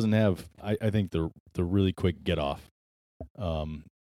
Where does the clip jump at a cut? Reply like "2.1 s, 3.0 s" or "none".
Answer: 1.1 s